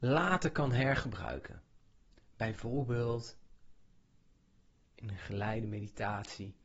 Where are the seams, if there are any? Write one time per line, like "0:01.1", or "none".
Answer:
none